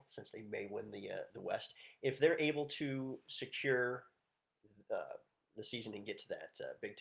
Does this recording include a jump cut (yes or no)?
no